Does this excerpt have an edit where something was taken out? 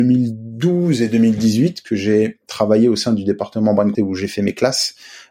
yes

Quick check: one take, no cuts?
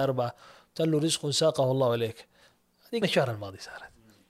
no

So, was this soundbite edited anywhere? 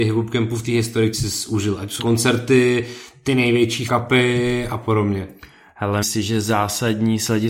yes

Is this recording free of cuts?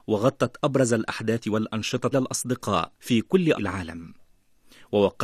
no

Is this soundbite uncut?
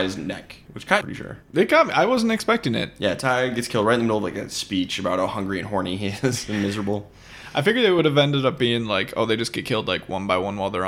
no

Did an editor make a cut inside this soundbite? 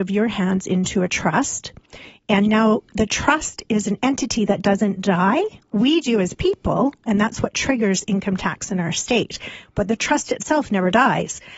no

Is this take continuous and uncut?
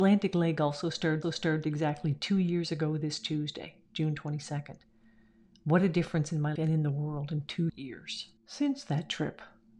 no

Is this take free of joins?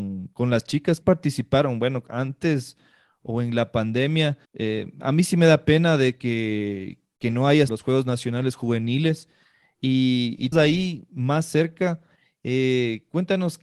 no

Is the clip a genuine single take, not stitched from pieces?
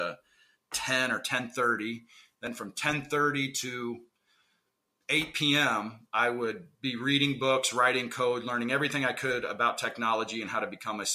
yes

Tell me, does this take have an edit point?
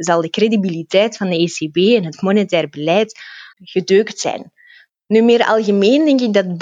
yes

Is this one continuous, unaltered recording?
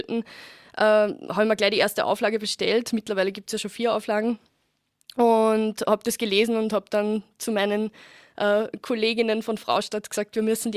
yes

